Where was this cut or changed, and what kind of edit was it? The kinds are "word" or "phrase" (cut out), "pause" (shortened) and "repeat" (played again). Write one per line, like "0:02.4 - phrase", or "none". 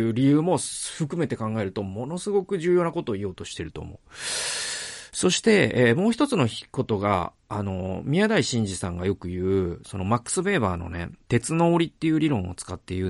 0:06.7 - pause